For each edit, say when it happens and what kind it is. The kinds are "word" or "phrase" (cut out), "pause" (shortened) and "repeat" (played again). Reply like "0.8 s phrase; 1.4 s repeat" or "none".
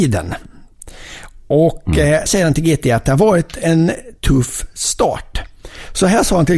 2.3 s word